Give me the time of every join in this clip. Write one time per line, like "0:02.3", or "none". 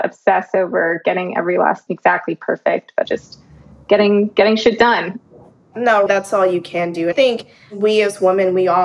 0:01.9
0:03.1
0:06.1
0:07.1